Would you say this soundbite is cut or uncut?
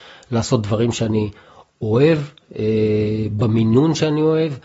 uncut